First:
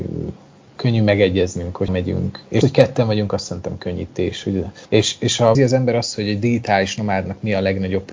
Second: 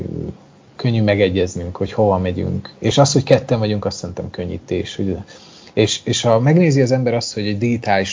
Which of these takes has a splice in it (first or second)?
first